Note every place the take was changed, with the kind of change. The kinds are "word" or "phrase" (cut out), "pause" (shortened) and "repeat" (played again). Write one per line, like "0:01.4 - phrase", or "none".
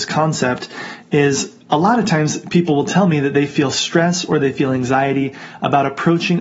0:01.6 - pause

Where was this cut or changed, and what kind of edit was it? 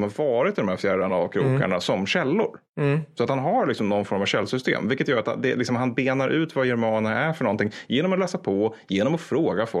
none

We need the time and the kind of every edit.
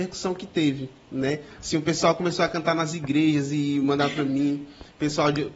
none

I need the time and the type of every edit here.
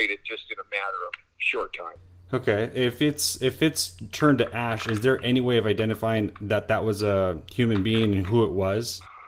none

